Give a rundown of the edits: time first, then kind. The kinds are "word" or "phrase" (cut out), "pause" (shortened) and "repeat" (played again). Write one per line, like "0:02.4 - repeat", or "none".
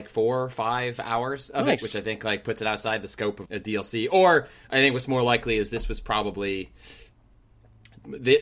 0:03.5 - word

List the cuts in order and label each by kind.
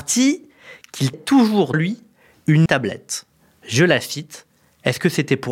0:01.1 - word
0:01.7 - word
0:02.7 - word

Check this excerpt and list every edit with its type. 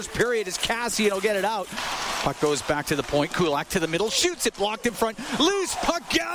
none

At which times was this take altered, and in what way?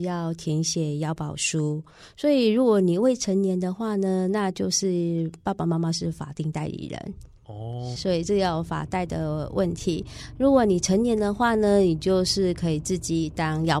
0:08.0 - word

